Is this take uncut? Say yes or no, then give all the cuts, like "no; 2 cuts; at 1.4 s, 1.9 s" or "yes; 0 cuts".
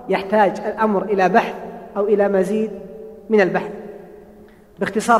yes; 0 cuts